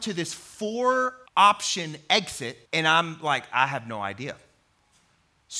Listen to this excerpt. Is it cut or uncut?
cut